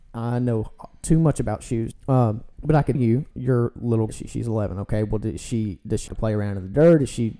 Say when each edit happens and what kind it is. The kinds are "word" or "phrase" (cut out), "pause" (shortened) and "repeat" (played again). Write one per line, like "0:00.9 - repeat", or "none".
0:01.9 - word
0:02.5 - pause
0:02.9 - word
0:03.3 - phrase
0:04.1 - phrase
0:06.1 - word